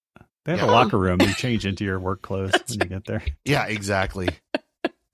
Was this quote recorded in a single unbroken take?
yes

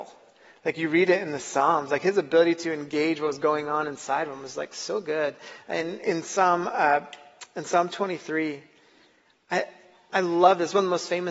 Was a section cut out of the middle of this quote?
no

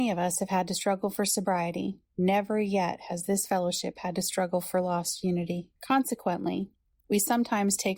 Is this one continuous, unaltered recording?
no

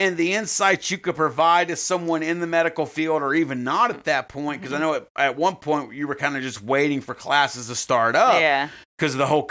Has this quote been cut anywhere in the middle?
no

